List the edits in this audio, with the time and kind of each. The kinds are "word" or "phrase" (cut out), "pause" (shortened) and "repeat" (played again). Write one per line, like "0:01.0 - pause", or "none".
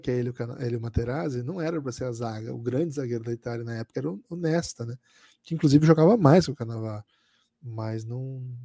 none